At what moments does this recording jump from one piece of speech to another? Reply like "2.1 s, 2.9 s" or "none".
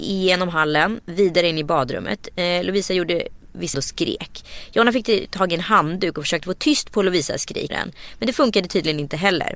3.7 s, 7.7 s